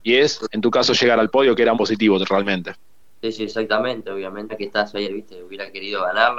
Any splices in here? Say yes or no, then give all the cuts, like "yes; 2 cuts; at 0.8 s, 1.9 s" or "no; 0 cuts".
yes; 3 cuts; at 1.7 s, 4.5 s, 5.0 s